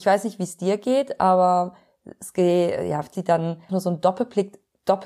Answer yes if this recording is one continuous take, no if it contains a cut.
no